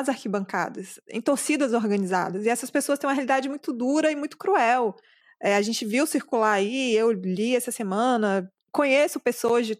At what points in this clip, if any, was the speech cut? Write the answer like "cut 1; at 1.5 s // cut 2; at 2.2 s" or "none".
none